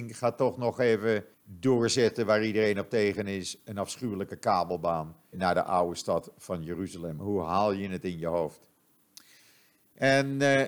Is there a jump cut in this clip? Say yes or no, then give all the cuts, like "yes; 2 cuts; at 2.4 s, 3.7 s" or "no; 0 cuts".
yes; 2 cuts; at 1.3 s, 5.3 s